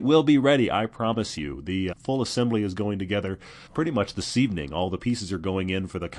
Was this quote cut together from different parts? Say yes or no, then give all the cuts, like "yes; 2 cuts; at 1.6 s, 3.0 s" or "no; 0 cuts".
yes; 2 cuts; at 1.9 s, 3.7 s